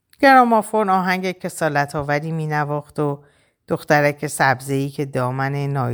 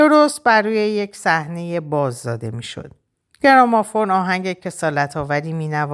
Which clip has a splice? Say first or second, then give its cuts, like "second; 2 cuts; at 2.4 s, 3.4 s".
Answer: second; 1 cut; at 3.1 s